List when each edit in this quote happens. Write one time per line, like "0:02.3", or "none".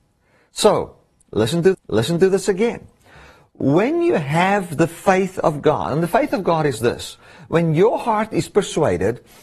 0:01.7

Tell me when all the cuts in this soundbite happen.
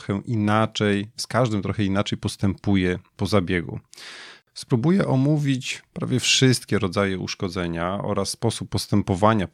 0:04.4

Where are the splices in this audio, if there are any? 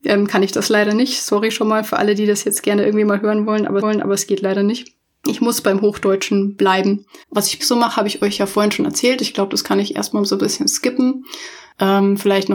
0:03.8
0:07.2
0:07.6

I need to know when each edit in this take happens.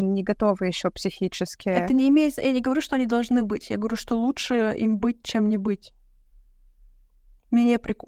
none

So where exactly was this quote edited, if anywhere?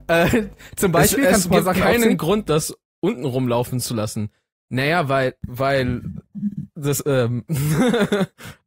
none

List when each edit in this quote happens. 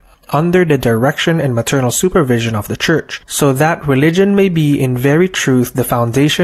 none

